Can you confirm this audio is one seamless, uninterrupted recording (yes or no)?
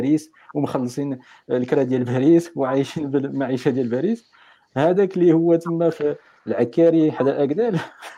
yes